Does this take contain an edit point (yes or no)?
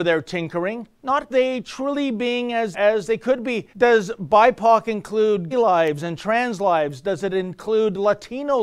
yes